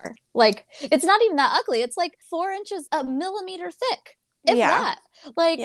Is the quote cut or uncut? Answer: cut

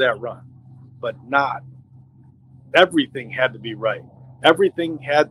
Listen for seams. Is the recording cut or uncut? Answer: uncut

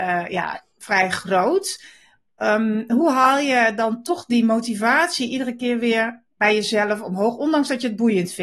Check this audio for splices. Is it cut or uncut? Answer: uncut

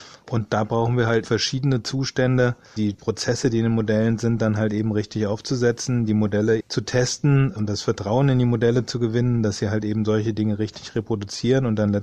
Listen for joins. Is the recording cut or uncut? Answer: cut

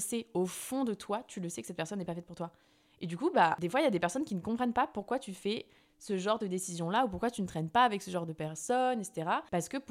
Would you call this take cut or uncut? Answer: uncut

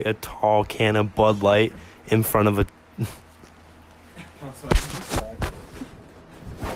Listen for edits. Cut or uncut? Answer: cut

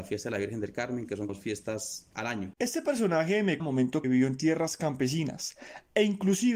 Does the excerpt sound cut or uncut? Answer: cut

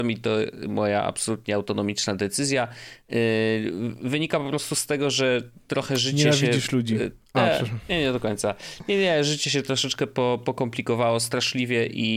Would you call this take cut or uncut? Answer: uncut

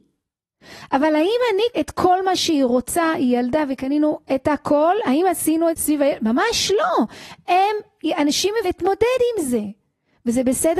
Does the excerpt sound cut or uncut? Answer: cut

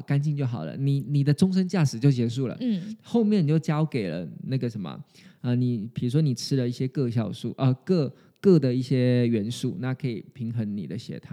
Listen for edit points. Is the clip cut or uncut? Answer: uncut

